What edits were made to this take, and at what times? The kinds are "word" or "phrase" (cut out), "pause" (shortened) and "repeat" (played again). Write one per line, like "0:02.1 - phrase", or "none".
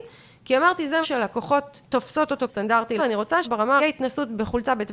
0:01.0 - word
0:01.8 - pause
0:02.5 - word
0:03.0 - word
0:03.4 - word
0:03.8 - phrase